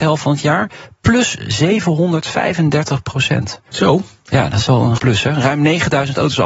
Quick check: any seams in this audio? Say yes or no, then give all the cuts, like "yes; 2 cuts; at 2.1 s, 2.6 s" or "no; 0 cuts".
yes; 2 cuts; at 4.7 s, 5.0 s